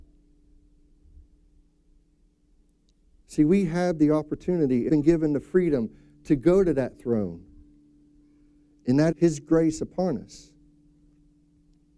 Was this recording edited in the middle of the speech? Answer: yes; 2 cuts; at 4.9 s, 9.1 s

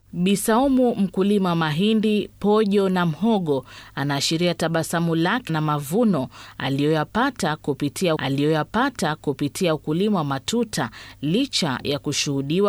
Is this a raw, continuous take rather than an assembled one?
no; 2 cuts; at 5.5 s, 8.2 s

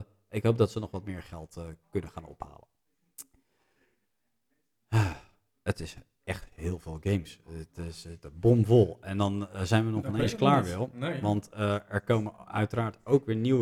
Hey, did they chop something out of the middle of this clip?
no; 0 cuts

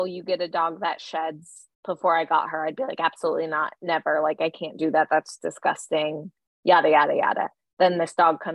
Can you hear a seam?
no; 0 cuts

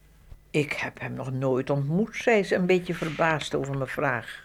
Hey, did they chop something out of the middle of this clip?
no; 0 cuts

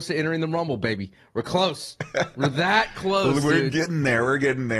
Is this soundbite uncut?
yes; 0 cuts

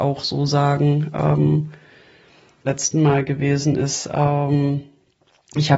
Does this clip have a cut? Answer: yes; 1 cut; at 2.6 s

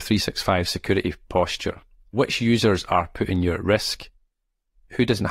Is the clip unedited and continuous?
yes; 0 cuts

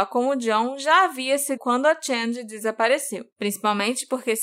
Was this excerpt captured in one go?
no; 2 cuts; at 1.6 s, 3.3 s

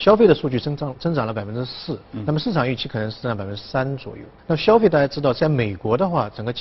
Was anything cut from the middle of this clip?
yes; 2 cuts; at 2.0 s, 4.4 s

